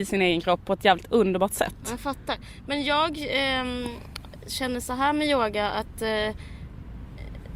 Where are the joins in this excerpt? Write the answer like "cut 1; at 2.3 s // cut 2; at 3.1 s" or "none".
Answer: none